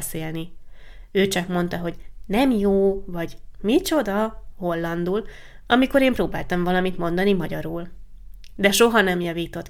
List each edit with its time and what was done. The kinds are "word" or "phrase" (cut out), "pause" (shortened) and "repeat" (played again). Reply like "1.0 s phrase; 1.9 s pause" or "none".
none